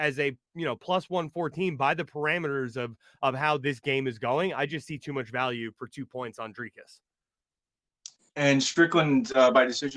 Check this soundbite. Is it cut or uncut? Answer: uncut